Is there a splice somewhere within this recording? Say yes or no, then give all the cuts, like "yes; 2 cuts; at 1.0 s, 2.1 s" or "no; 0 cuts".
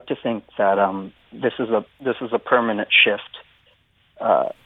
no; 0 cuts